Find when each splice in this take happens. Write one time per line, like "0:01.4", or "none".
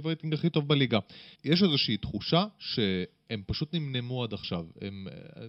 0:01.3